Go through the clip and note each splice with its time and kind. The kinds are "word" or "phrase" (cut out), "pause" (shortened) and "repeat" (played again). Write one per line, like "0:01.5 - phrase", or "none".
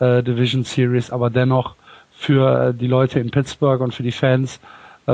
none